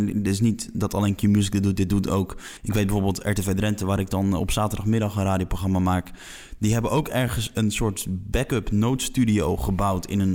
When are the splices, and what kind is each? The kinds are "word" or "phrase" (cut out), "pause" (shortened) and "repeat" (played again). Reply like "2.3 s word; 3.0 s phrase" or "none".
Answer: 2.6 s pause

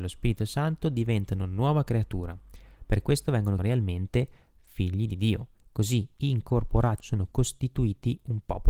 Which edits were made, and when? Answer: 3.6 s phrase; 5.6 s pause; 7.0 s phrase

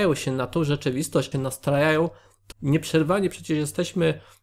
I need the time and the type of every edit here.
1.3 s phrase; 2.5 s word

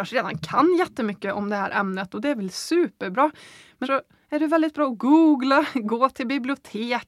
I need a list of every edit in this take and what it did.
3.8 s word

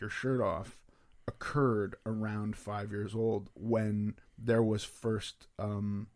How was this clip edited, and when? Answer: 4.3 s pause

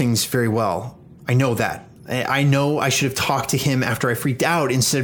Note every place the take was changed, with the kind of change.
1.2 s pause; 2.0 s pause

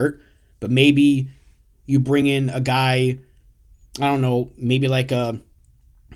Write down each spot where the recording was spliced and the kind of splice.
none

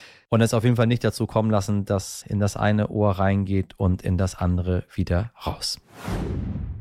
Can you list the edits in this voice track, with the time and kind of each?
2.2 s word

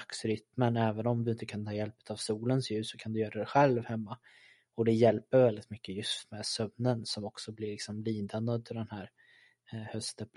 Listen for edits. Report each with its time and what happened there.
none

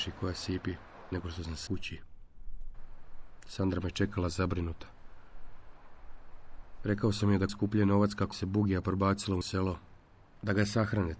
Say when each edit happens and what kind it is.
1.1 s word; 1.7 s word; 7.5 s word; 8.3 s word; 9.4 s word

